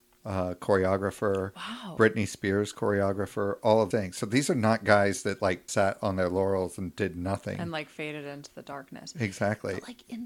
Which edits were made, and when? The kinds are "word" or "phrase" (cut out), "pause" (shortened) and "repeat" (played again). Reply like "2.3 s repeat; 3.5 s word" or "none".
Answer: 3.9 s word; 5.7 s word